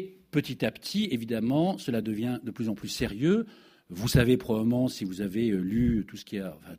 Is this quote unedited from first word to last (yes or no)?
yes